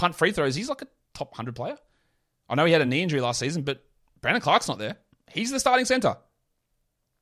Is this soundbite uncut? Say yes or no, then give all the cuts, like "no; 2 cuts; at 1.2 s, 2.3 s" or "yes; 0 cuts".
yes; 0 cuts